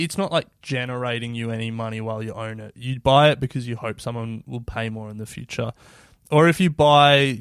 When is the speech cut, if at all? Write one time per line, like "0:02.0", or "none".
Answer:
none